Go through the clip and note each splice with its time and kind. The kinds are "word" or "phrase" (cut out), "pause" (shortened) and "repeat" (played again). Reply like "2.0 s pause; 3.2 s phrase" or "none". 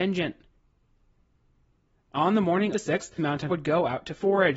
2.7 s word; 3.2 s word; 3.5 s word